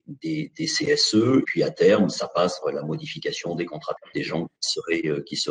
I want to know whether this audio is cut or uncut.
cut